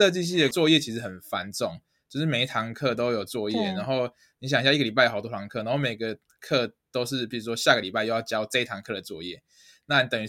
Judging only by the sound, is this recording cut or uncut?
uncut